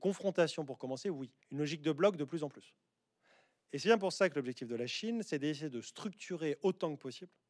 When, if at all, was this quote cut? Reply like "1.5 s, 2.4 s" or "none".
1.4 s